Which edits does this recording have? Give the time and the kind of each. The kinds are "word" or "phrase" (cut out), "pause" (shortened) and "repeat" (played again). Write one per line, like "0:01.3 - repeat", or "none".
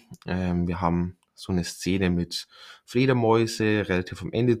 none